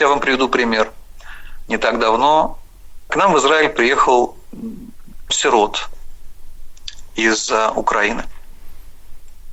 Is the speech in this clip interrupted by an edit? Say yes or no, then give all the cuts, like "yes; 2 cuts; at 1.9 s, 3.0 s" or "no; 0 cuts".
yes; 2 cuts; at 3.1 s, 5.3 s